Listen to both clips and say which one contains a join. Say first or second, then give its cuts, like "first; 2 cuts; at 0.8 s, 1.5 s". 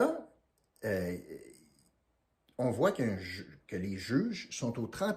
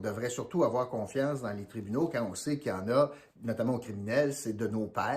second; 1 cut; at 3.3 s